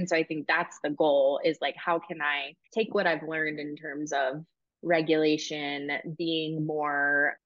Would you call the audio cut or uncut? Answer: cut